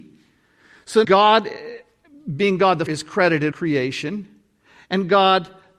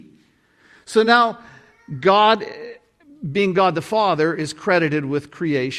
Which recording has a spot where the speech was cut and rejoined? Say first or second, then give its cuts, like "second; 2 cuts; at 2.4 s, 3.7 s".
first; 3 cuts; at 1.0 s, 2.9 s, 3.5 s